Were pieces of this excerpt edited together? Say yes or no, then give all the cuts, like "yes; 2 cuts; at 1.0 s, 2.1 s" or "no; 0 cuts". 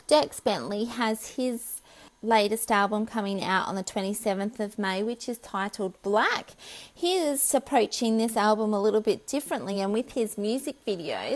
no; 0 cuts